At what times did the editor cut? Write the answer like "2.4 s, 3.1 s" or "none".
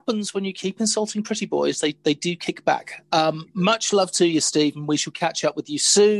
none